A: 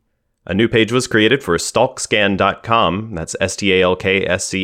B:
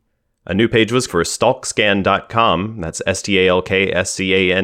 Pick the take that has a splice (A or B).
B